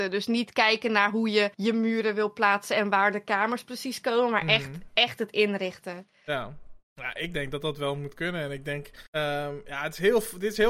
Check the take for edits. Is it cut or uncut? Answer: cut